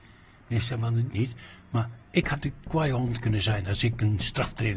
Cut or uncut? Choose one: cut